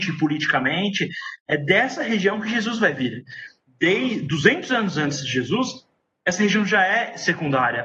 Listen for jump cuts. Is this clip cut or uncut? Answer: uncut